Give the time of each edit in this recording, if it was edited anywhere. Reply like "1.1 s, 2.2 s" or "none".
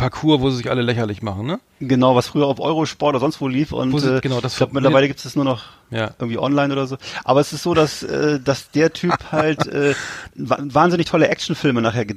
none